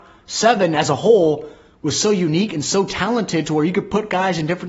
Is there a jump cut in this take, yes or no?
no